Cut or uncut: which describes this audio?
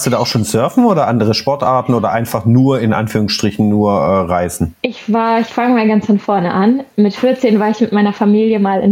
cut